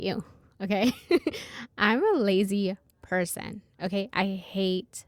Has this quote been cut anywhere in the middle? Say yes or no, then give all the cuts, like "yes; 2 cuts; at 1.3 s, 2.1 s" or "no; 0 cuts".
no; 0 cuts